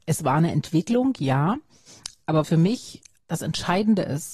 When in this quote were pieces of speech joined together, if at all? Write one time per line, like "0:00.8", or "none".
0:02.4
0:03.2